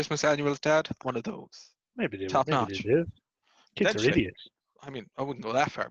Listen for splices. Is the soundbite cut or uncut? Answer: cut